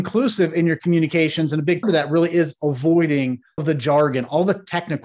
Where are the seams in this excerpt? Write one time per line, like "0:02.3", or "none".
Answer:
0:01.8
0:03.6

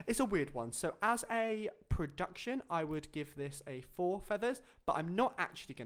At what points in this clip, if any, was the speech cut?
none

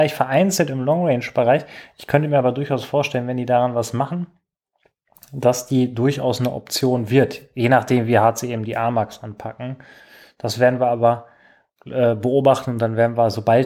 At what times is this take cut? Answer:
none

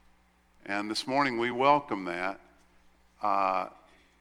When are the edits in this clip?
none

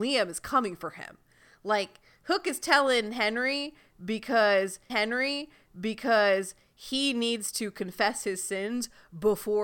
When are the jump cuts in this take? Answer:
0:04.9

